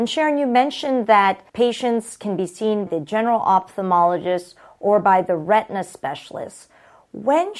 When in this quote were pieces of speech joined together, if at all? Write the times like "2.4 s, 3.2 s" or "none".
1.5 s, 2.9 s